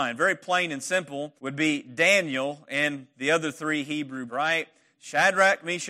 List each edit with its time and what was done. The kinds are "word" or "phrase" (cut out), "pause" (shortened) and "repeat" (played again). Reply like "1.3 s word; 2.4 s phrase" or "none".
1.4 s pause; 4.3 s word